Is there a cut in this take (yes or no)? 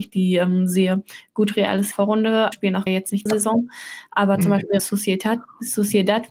yes